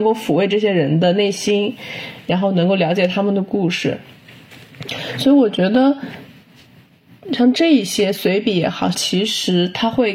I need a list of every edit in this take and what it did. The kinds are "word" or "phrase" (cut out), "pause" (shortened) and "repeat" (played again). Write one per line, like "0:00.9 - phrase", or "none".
0:08.9 - phrase